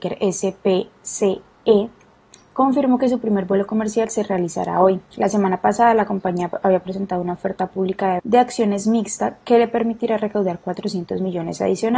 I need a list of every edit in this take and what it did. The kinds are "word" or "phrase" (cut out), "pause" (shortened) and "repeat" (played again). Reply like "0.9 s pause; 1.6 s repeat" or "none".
8.2 s word